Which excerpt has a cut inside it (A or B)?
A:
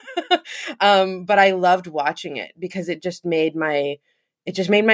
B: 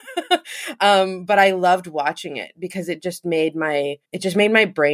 B